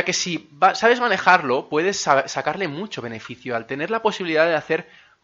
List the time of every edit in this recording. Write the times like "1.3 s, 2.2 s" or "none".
none